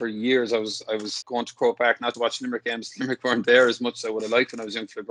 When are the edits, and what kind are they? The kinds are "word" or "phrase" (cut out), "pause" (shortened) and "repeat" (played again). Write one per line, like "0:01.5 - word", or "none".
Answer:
0:01.2 - word
0:02.1 - word